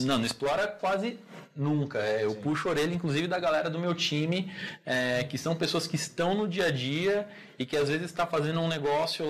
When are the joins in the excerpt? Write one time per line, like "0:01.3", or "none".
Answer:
none